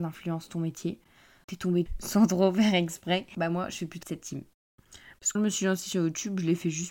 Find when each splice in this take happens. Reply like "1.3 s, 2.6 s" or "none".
1.4 s, 1.9 s, 4.0 s, 5.3 s